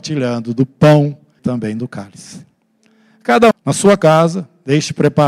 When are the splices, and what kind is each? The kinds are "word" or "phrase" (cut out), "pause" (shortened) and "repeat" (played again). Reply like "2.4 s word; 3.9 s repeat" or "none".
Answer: 1.4 s word; 3.5 s word